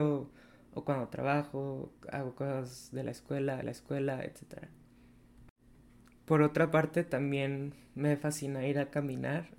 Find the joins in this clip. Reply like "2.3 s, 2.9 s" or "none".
3.6 s